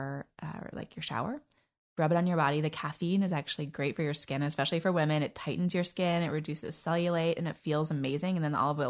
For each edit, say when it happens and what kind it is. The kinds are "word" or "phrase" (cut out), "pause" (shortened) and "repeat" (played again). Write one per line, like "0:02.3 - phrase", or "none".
none